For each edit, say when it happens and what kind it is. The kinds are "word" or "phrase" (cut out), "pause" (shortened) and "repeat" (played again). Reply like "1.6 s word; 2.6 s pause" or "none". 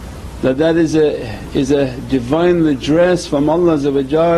none